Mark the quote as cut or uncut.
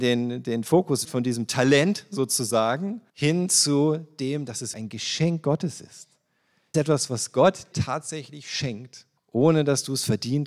cut